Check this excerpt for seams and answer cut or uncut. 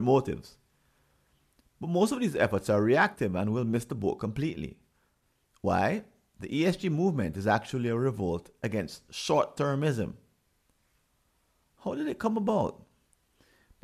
uncut